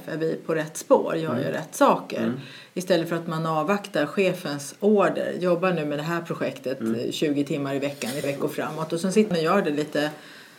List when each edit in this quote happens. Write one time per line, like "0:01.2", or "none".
0:08.2
0:09.3